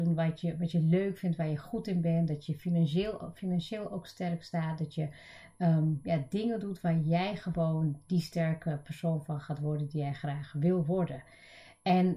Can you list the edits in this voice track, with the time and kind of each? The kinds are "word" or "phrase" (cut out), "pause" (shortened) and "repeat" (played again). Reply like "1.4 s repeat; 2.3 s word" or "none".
none